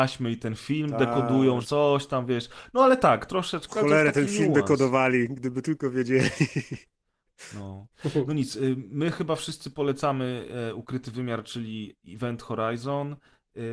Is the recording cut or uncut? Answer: cut